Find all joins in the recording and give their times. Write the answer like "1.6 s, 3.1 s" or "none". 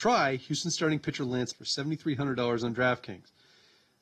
1.5 s